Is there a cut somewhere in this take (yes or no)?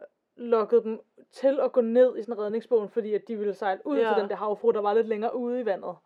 no